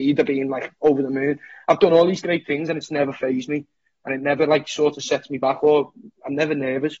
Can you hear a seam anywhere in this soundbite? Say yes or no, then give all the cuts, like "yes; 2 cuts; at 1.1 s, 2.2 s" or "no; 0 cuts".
no; 0 cuts